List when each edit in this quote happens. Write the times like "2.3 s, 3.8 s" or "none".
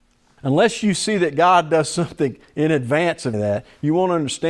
3.3 s